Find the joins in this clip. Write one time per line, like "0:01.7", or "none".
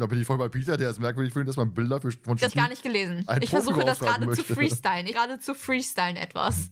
0:02.5
0:05.1